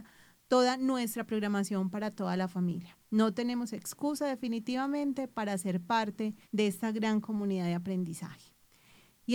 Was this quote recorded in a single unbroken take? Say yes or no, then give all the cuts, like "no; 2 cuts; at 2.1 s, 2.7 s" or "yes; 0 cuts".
no; 2 cuts; at 3.0 s, 6.4 s